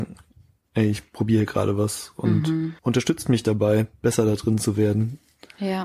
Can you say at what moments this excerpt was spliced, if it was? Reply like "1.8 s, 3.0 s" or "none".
2.8 s